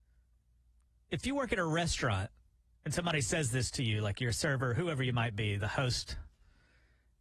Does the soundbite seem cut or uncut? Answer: uncut